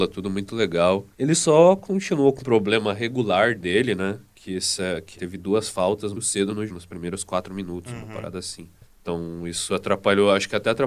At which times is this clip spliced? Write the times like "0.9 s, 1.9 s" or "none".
1.1 s, 2.4 s, 5.1 s, 6.1 s, 6.7 s, 8.8 s